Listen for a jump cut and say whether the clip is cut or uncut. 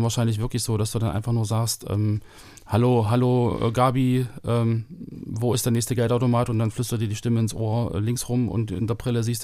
uncut